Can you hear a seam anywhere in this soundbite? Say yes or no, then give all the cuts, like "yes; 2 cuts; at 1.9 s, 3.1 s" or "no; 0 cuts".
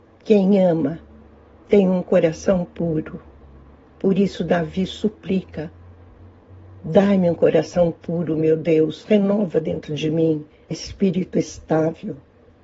yes; 1 cut; at 10.7 s